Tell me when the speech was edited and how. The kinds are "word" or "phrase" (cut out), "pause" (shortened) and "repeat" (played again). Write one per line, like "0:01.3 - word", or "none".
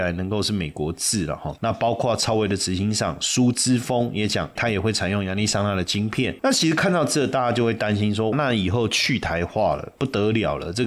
0:04.6 - word
0:08.3 - word